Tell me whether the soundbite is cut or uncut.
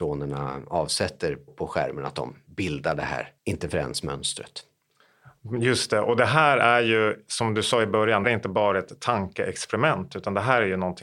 cut